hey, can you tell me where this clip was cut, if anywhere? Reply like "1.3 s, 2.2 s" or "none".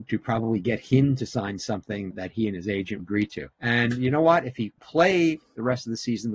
2.1 s, 3.0 s, 3.5 s, 4.8 s